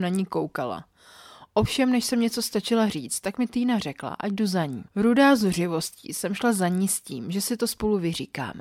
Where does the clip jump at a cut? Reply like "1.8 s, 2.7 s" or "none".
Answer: 4.9 s